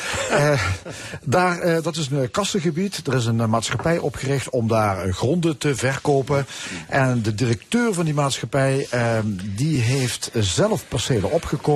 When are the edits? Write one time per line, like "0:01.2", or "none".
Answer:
none